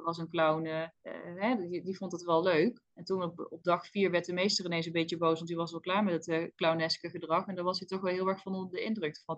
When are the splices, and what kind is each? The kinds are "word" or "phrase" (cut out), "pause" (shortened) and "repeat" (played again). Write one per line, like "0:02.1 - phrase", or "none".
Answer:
0:00.9 - pause
0:02.9 - pause

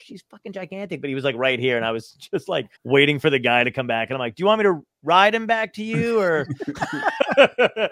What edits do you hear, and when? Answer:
0:02.7 - pause

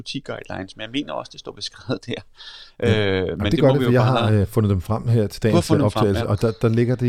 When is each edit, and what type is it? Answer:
none

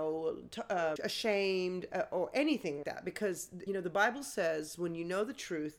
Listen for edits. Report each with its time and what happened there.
0:01.0 - word
0:02.8 - word
0:03.7 - word

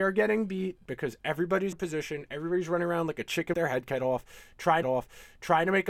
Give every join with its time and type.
0:01.7 - word
0:03.5 - word
0:04.8 - repeat

